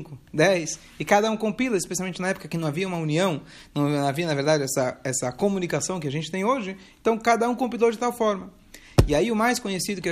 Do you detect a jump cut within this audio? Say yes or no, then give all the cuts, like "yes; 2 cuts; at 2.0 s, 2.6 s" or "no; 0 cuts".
no; 0 cuts